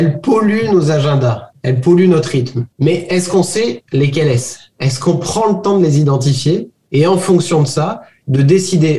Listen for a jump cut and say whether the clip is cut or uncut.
uncut